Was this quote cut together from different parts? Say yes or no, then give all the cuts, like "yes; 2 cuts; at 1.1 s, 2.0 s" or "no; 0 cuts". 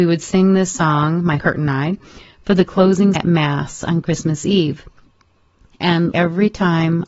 yes; 3 cuts; at 1.4 s, 3.2 s, 6.1 s